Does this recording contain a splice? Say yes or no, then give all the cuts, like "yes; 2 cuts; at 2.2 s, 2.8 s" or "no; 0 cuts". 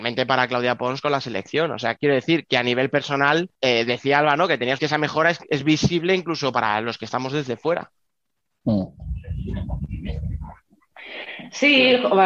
yes; 3 cuts; at 1.9 s, 3.5 s, 4.8 s